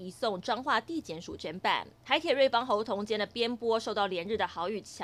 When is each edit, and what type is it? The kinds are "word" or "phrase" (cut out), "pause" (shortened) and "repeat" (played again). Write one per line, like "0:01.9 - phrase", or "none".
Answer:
0:02.0 - pause